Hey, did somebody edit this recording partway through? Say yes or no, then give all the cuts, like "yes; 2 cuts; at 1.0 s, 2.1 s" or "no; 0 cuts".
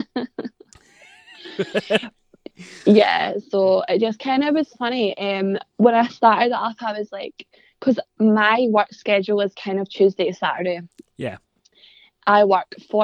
no; 0 cuts